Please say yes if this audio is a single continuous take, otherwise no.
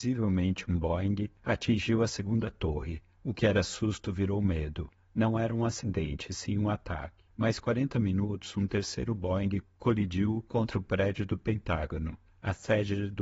no